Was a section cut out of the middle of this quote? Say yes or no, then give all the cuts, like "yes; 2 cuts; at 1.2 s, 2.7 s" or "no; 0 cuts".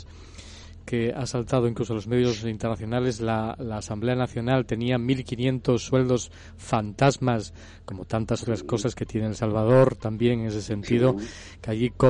no; 0 cuts